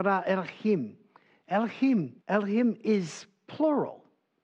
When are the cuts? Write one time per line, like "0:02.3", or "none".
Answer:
0:02.2